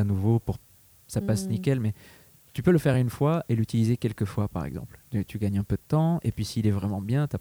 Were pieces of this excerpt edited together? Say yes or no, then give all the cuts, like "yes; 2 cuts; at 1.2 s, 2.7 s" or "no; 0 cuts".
no; 0 cuts